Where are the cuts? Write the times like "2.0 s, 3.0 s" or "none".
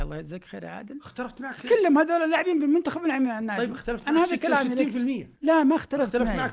5.4 s

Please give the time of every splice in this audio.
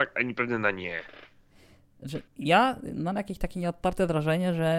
2.3 s

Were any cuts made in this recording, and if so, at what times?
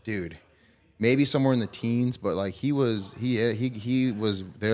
none

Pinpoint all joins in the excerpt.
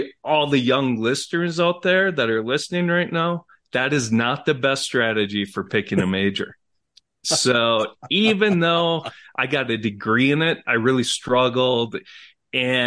none

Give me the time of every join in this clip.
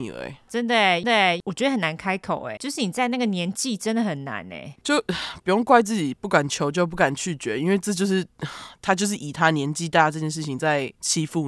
1.0 s, 2.6 s

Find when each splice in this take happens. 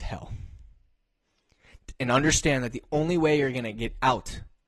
none

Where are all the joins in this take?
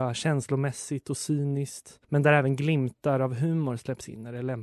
2.0 s

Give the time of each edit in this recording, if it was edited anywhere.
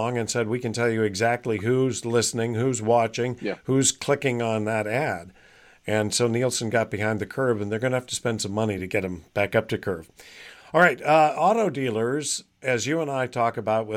none

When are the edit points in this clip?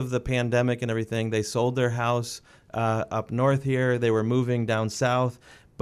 none

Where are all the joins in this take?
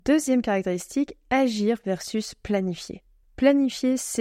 3.2 s

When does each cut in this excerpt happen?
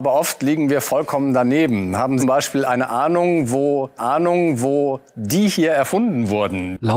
2.2 s, 4.0 s

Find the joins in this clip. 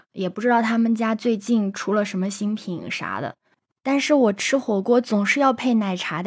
none

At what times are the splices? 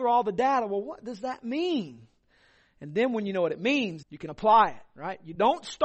4.0 s

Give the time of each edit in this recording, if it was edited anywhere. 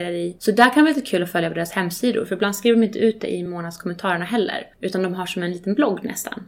none

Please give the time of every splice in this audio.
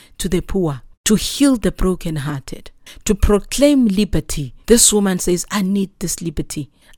0.9 s, 4.6 s

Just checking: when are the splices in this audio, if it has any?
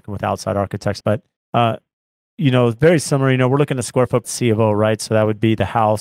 1.0 s, 1.4 s, 4.2 s

